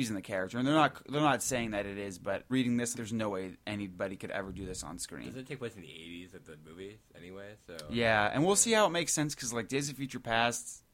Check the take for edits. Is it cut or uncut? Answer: cut